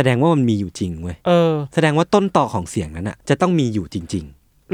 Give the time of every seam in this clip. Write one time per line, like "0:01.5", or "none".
0:01.2
0:03.2